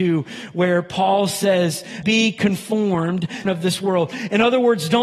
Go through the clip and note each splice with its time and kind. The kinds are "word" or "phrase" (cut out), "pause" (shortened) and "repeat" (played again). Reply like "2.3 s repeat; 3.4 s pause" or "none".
2.0 s word; 3.5 s phrase